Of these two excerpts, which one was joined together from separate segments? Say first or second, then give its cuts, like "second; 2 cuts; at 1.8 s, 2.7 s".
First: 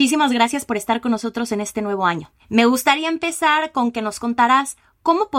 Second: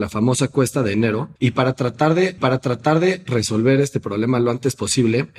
second; 2 cuts; at 1.4 s, 2.4 s